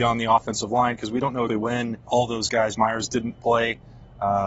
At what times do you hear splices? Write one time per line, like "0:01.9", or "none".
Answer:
0:01.5
0:02.1
0:02.7